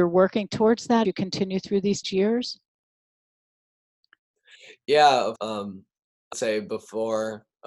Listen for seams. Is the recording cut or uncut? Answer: cut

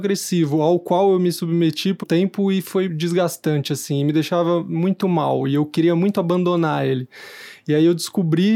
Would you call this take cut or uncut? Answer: cut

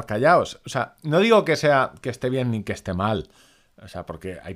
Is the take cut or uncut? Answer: uncut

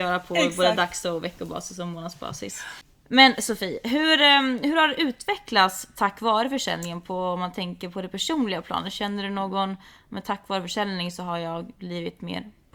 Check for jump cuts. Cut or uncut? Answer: uncut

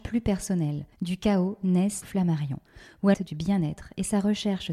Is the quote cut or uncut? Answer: cut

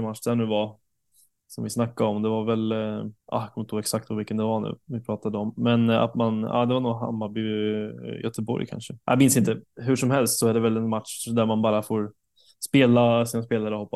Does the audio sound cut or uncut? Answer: cut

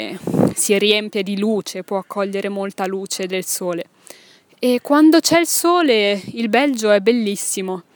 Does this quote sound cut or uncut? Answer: uncut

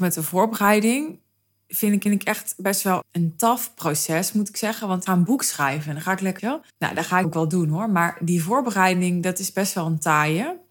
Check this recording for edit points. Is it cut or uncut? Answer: cut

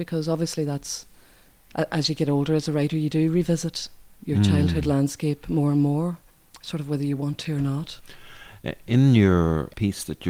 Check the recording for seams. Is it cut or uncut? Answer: uncut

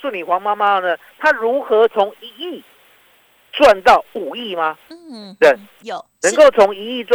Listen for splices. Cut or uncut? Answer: uncut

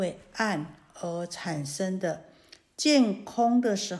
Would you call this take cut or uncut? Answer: uncut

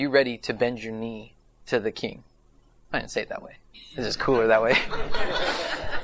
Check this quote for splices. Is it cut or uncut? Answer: uncut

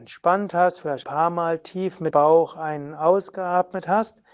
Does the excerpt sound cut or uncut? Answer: cut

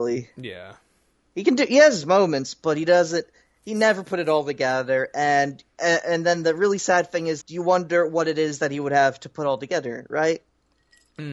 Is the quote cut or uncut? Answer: cut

